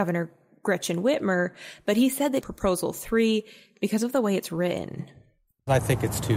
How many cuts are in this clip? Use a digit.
1